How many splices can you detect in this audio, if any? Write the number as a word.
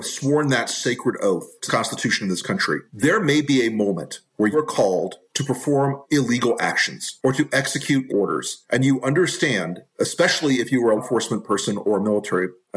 four